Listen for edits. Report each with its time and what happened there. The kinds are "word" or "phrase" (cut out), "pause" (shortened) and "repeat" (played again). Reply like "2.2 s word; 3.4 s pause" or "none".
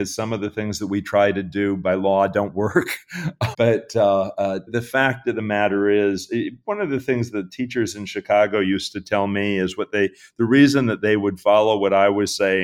3.5 s word; 4.7 s word

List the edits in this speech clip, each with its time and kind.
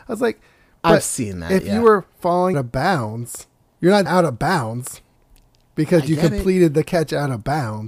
2.5 s word; 4.1 s word

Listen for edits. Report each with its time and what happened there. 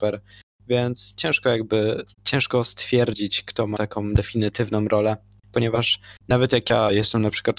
2.1 s pause; 3.8 s word; 6.2 s pause

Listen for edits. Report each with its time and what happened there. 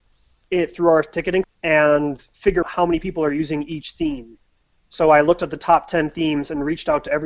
1.4 s word; 2.6 s word

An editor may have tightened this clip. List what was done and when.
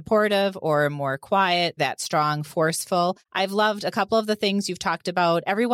1.8 s word

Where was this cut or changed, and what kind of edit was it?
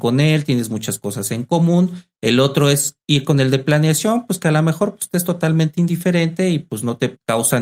none

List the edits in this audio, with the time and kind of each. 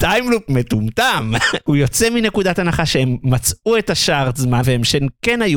4.6 s word

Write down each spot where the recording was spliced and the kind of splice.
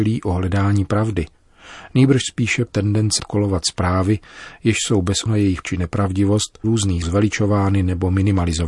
2.7 s word; 3.2 s word; 5.3 s word; 5.6 s word; 6.6 s word; 7.0 s word

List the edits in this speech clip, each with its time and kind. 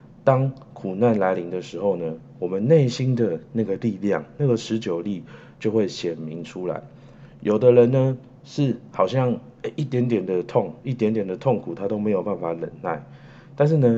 10.8 s pause

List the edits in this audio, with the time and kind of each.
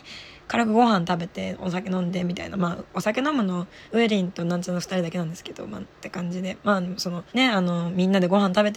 3.9 s pause; 7.3 s pause

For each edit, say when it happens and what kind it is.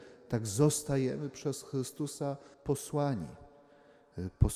2.5 s pause

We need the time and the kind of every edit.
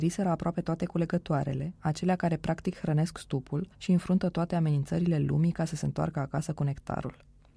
3.7 s pause

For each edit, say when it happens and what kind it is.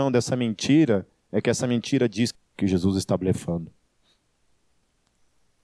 2.3 s phrase

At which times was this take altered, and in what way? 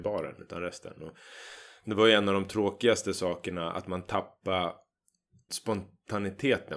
5.5 s word

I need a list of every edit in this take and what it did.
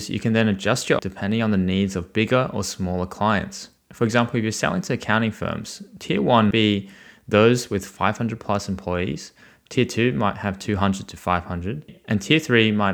1.0 s word; 6.5 s word

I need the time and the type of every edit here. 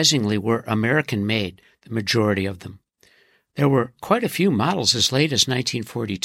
none

